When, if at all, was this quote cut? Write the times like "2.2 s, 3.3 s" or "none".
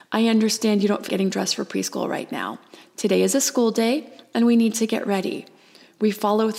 1.1 s